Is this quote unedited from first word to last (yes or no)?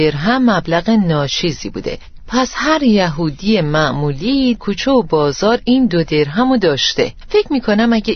no